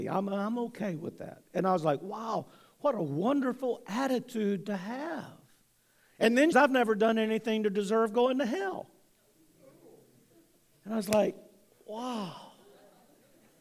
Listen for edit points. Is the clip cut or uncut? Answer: cut